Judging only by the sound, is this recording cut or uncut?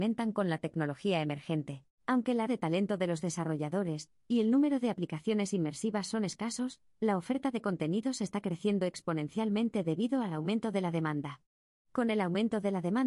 cut